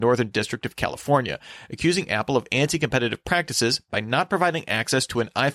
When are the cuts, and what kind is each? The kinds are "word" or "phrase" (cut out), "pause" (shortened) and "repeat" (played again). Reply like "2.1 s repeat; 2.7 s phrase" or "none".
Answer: none